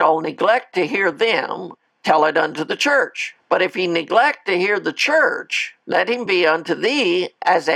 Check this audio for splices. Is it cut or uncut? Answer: uncut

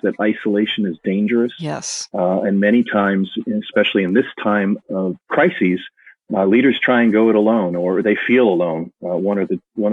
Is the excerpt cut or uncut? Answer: uncut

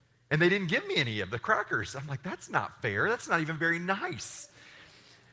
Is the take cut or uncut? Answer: uncut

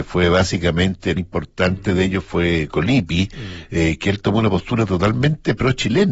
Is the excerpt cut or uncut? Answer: cut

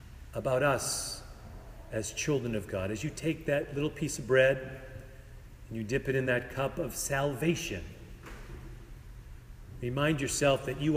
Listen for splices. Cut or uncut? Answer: uncut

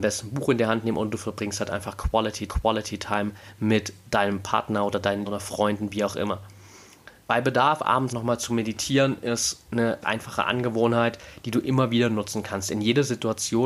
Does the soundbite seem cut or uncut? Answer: cut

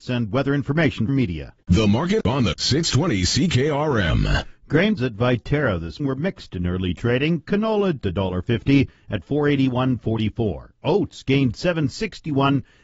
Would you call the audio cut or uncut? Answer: cut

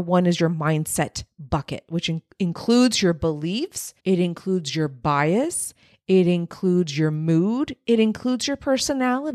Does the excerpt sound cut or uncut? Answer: cut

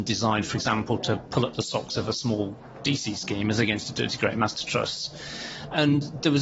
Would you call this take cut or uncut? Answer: uncut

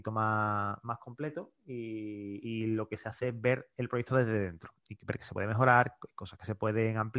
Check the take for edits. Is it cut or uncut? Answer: uncut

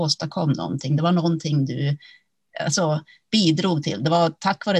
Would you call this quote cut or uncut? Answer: uncut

